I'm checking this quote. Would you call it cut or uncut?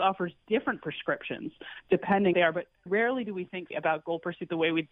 cut